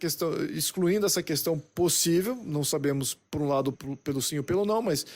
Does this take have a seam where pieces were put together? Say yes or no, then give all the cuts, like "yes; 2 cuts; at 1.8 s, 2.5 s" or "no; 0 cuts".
yes; 1 cut; at 3.7 s